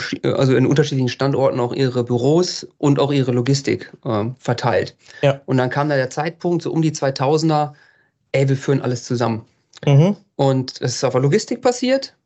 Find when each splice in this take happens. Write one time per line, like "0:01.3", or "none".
none